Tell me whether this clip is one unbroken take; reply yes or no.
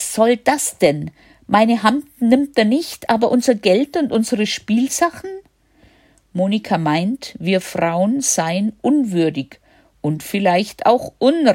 yes